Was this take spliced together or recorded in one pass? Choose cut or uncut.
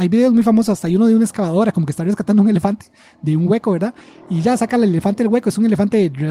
uncut